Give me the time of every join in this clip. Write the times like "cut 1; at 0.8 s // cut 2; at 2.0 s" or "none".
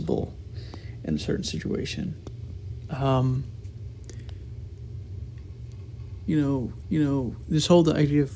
cut 1; at 6.8 s

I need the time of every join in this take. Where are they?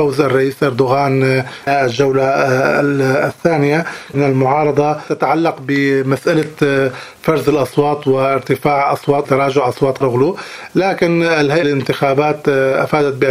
cut 1; at 1.7 s // cut 2; at 4.1 s // cut 3; at 9.2 s // cut 4; at 10.0 s // cut 5; at 11.6 s

